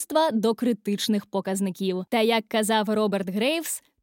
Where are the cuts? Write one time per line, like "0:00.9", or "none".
0:02.1